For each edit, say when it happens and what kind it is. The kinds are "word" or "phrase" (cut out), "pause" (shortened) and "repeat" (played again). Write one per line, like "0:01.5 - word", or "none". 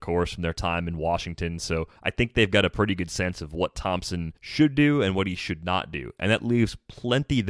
0:02.0 - pause
0:04.4 - pause